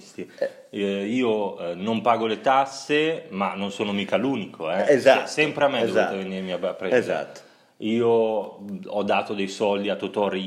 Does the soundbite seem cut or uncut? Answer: uncut